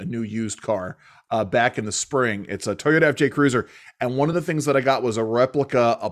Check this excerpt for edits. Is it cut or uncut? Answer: uncut